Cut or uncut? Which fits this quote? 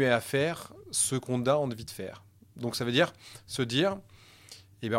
uncut